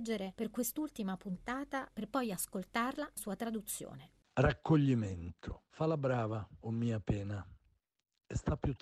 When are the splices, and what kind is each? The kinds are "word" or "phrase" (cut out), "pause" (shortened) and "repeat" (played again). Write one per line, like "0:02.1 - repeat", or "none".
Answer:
0:01.9 - phrase
0:03.2 - word
0:05.7 - pause